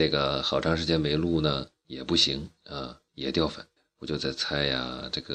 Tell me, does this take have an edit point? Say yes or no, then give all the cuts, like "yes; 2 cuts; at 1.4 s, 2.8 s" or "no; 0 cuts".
yes; 2 cuts; at 3.1 s, 3.8 s